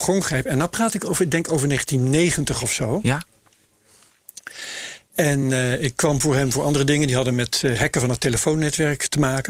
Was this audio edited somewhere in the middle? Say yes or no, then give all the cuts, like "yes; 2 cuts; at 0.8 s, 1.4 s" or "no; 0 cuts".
no; 0 cuts